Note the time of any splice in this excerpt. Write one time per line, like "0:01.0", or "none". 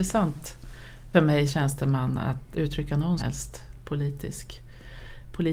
0:01.1
0:01.5
0:02.5
0:03.2